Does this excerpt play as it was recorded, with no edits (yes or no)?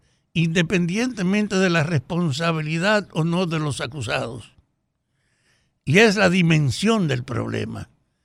yes